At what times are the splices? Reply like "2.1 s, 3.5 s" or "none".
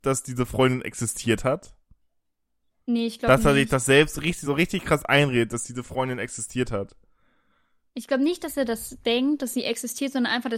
none